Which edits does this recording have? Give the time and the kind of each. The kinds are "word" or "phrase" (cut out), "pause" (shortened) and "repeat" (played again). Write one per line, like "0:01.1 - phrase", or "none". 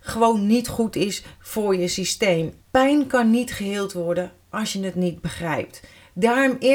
0:02.6 - pause